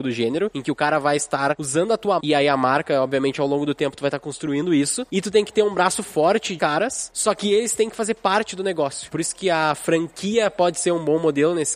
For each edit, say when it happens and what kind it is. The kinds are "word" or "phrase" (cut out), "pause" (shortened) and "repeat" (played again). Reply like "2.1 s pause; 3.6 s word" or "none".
2.2 s word; 6.6 s phrase